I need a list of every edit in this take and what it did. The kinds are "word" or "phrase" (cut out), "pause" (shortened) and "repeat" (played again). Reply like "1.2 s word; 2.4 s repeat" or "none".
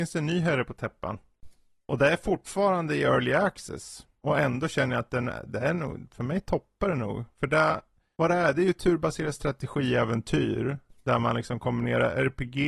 none